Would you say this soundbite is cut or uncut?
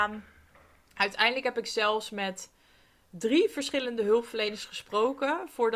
uncut